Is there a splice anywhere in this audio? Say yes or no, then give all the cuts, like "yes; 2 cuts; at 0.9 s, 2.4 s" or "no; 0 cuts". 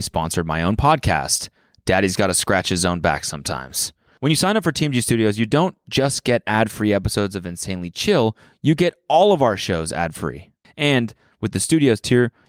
no; 0 cuts